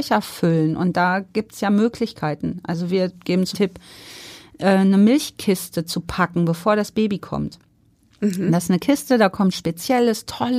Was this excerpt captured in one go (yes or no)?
no